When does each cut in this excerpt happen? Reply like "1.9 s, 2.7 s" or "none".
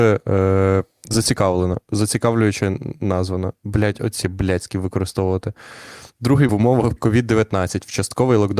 0.9 s, 4.2 s, 6.5 s, 7.0 s